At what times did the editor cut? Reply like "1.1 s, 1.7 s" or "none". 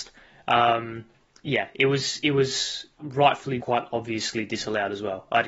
3.0 s, 3.6 s